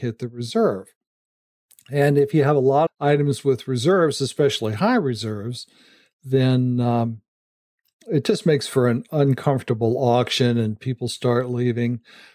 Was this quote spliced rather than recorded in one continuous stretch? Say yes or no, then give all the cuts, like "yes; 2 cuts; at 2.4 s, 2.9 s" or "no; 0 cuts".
yes; 1 cut; at 2.9 s